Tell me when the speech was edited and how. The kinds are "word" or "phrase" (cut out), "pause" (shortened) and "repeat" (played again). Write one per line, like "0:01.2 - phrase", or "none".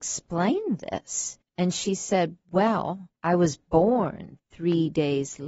0:01.4 - pause
0:03.2 - pause